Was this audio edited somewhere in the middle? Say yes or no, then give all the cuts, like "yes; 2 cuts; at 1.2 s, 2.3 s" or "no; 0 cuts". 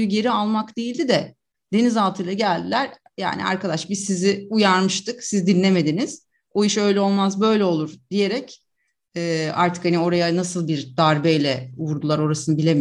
no; 0 cuts